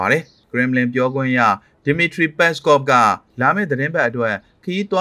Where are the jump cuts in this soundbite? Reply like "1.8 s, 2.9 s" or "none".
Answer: none